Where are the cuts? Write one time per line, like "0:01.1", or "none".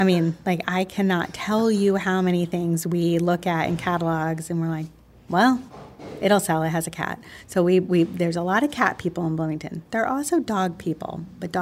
none

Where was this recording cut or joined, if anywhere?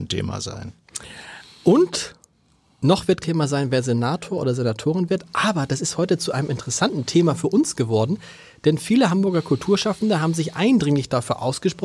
0:03.2

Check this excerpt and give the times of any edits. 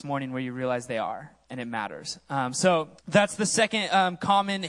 0:01.4
0:03.0

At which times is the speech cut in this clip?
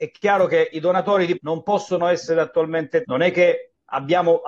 0:01.4
0:03.0

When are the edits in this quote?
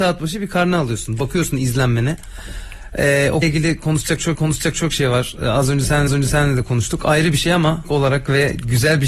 0:03.4
0:04.4
0:06.1
0:07.8

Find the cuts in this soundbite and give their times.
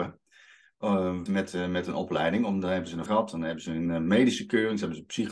0:01.3
0:03.1

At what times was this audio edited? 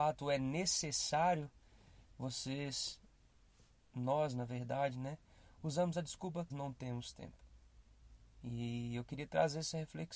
0:06.5

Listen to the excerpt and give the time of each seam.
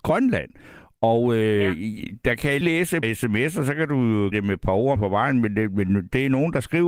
0:02.6
0:03.0
0:04.3
0:05.0

